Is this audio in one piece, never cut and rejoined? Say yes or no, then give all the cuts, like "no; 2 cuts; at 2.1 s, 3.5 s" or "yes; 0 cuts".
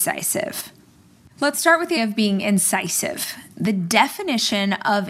no; 1 cut; at 2.0 s